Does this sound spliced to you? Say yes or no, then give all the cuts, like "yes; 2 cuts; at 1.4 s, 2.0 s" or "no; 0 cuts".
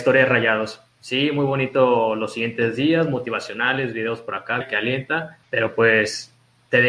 yes; 2 cuts; at 4.6 s, 5.4 s